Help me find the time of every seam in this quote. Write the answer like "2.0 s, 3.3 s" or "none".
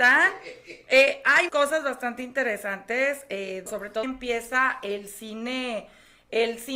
1.5 s, 3.7 s, 4.0 s